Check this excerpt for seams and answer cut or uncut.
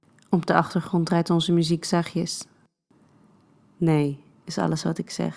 uncut